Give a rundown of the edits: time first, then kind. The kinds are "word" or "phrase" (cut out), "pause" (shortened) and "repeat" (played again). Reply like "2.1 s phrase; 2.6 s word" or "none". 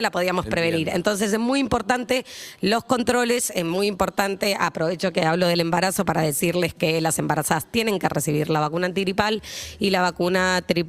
none